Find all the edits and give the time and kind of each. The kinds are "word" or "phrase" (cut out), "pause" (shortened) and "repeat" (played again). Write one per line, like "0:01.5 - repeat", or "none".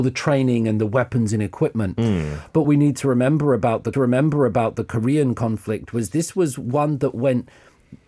0:02.6 - word
0:03.9 - repeat